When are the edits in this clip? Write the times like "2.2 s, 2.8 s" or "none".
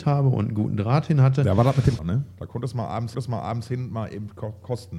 2.0 s, 3.1 s